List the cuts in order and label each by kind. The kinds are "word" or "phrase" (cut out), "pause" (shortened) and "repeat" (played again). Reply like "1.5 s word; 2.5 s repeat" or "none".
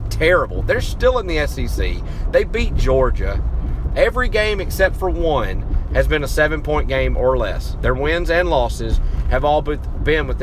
none